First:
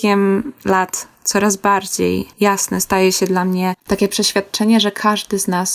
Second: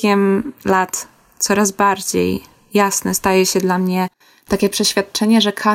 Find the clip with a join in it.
first; 3 cuts; at 1.2 s, 2.3 s, 3.8 s

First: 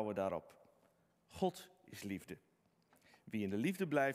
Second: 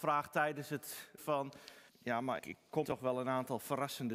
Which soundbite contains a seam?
second; 4 cuts; at 1.2 s, 1.9 s, 2.4 s, 2.8 s

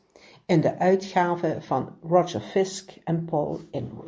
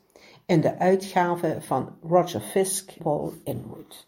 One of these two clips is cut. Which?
second; 1 cut; at 3.0 s

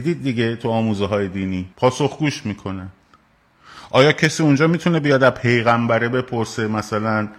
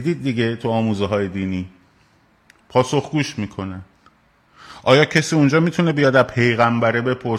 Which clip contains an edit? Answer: first; 1 cut; at 1.7 s

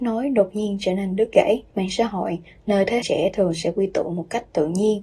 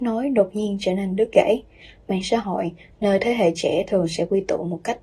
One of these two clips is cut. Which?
first; 2 cuts; at 1.7 s, 3.0 s

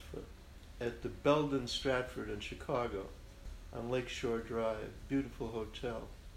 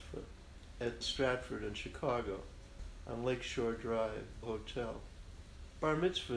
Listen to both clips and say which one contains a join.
second; 2 cuts; at 1.0 s, 4.4 s

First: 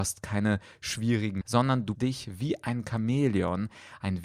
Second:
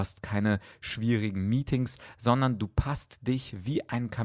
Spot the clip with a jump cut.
first; 2 cuts; at 1.4 s, 2.0 s

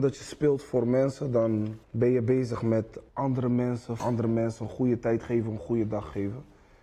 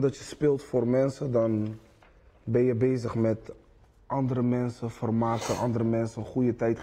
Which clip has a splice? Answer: first; 3 cuts; at 1.8 s, 3.1 s, 4.0 s

